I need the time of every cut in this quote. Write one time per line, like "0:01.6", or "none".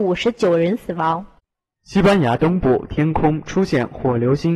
0:01.4